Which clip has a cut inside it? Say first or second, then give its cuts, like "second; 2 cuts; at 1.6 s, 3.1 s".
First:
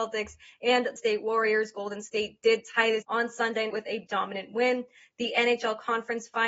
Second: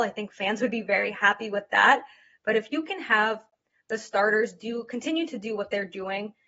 first; 4 cuts; at 1.0 s, 3.0 s, 3.7 s, 4.1 s